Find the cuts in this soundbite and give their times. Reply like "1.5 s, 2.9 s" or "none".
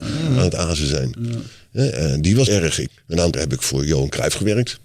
2.5 s, 2.9 s, 3.3 s